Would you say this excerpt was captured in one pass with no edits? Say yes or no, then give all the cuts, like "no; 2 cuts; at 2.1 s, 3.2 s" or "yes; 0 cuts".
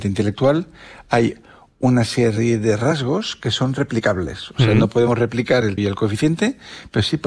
no; 1 cut; at 5.8 s